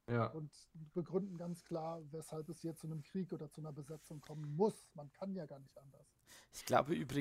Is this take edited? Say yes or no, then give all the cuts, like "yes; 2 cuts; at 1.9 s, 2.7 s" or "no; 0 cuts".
no; 0 cuts